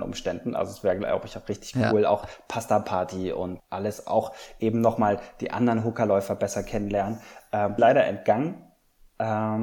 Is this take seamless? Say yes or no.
no